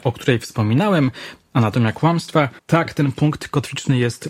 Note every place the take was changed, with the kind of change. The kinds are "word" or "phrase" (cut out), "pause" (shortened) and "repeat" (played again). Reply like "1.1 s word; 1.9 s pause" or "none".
2.6 s pause